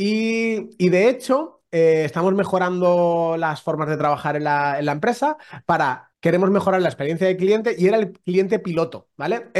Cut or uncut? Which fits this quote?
cut